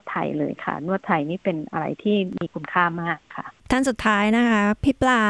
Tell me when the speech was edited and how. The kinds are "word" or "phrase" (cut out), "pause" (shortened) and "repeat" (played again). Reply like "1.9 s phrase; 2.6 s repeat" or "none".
3.6 s pause